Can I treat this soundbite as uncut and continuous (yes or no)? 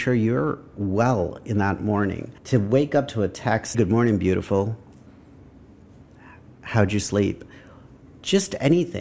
no